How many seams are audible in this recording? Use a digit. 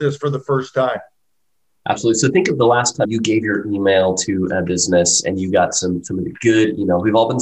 1